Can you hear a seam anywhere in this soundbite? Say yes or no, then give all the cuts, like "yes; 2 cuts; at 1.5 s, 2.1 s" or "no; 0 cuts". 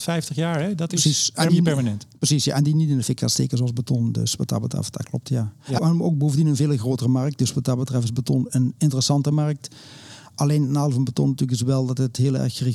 yes; 2 cuts; at 1.5 s, 5.8 s